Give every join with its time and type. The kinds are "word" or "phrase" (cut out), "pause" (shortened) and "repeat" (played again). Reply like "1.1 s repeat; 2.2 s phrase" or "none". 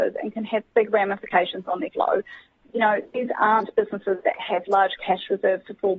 1.9 s word

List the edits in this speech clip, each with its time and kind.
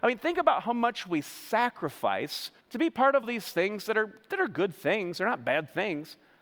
2.6 s pause; 3.2 s word

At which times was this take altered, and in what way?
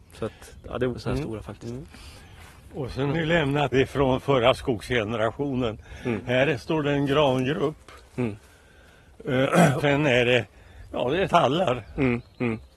0.9 s word; 3.1 s word; 3.7 s phrase; 9.8 s word; 11.2 s phrase

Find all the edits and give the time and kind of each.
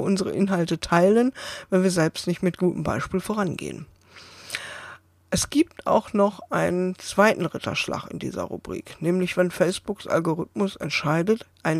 none

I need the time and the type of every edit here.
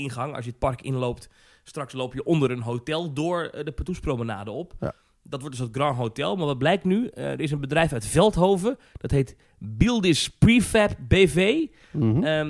none

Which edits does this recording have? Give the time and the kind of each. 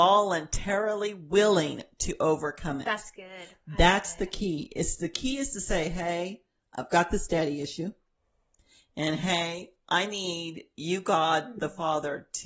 none

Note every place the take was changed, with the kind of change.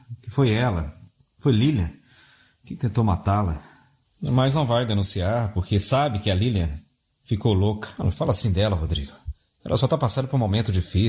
none

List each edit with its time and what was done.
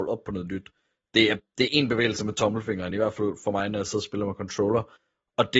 none

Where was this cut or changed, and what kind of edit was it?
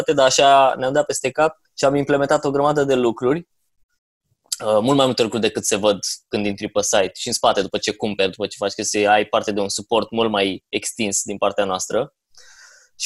1.6 s pause

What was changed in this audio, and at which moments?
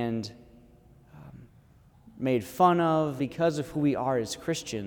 1.9 s pause; 3.2 s phrase

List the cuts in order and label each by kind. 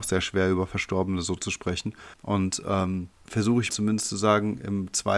2.1 s pause; 3.2 s word; 3.7 s word

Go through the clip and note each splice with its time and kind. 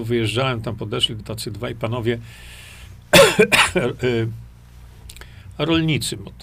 1.2 s word

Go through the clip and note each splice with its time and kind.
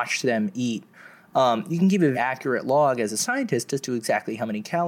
2.1 s word

